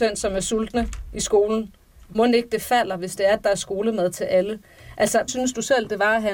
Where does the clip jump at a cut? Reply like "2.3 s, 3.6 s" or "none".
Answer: 2.1 s, 5.3 s